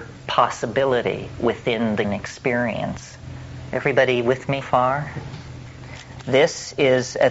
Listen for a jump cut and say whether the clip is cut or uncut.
cut